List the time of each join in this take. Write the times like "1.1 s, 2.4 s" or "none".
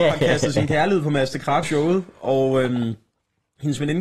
1.6 s